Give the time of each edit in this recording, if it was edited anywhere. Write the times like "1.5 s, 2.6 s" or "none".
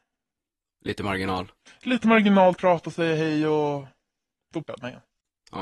2.6 s, 4.6 s